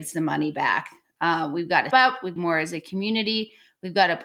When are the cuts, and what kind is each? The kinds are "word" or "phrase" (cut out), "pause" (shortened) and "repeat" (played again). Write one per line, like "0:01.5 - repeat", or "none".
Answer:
0:01.9 - word
0:02.4 - phrase

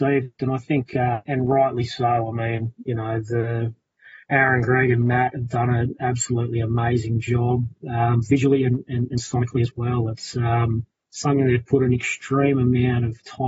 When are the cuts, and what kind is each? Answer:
0:01.2 - word
0:04.2 - pause
0:10.9 - pause

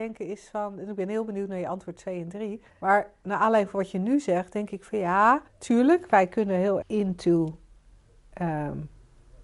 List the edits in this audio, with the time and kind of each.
0:02.7 - pause
0:05.5 - pause
0:06.8 - word

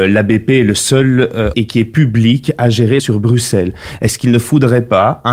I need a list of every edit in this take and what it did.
0:01.5 - word
0:03.0 - phrase

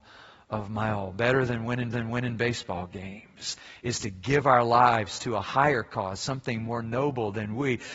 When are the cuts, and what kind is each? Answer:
0:01.9 - repeat

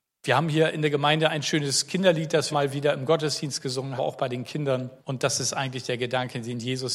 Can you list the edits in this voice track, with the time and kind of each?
0:02.5 - phrase
0:04.0 - phrase
0:05.0 - pause

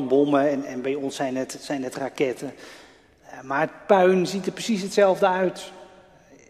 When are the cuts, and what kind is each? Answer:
none

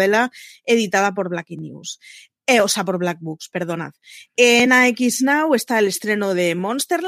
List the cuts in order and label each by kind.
none

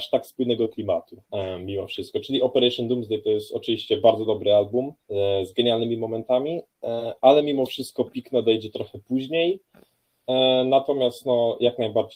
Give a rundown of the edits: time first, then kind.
0:01.2 - pause
0:05.0 - pause

